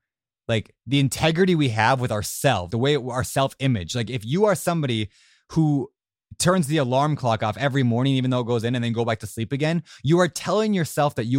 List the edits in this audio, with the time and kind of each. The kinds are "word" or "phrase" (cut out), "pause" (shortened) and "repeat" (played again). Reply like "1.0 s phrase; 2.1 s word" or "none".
2.7 s word